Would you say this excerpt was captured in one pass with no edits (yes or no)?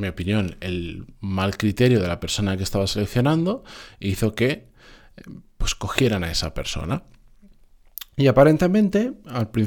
yes